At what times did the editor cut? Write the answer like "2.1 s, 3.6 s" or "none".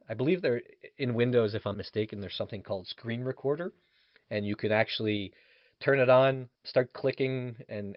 1.7 s, 6.5 s